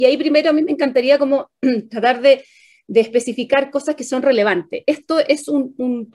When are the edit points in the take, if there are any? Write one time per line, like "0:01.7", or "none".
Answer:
none